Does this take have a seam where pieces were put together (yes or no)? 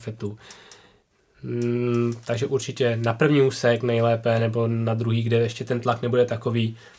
no